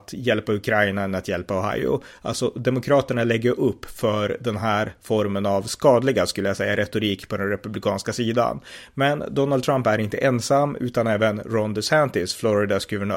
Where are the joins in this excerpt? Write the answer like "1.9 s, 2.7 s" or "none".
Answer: none